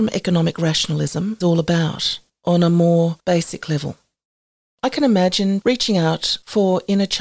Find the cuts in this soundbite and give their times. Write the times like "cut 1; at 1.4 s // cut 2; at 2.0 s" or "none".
cut 1; at 1.4 s // cut 2; at 5.6 s